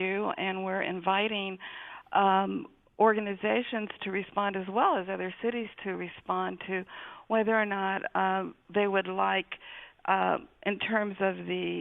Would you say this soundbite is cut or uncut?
uncut